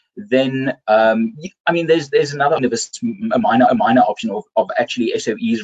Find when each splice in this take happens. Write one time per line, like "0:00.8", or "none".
0:02.6
0:03.7